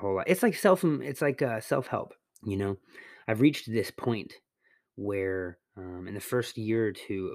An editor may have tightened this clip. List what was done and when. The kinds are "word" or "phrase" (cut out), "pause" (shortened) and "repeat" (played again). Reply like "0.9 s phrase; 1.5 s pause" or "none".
2.3 s pause; 5.7 s pause